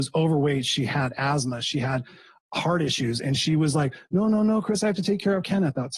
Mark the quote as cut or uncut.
uncut